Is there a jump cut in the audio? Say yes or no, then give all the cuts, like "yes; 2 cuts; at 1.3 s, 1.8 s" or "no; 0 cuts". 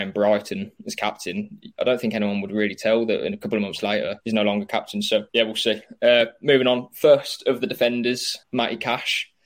yes; 3 cuts; at 4.2 s, 5.3 s, 8.4 s